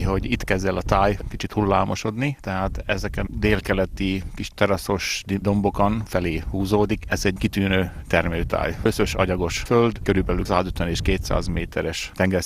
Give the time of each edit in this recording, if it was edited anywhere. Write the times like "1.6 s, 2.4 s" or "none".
3.3 s, 6.1 s

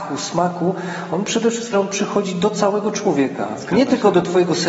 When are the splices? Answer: 1.7 s

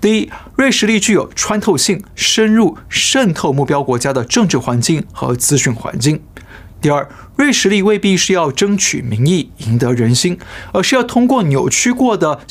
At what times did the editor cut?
2.1 s

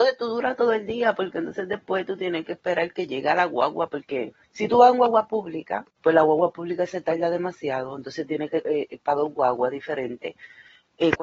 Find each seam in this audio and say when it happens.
4.4 s, 5.9 s, 8.6 s

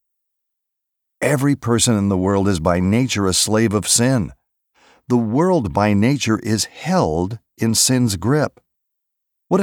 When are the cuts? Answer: none

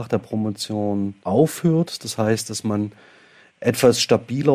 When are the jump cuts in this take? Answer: 1.2 s

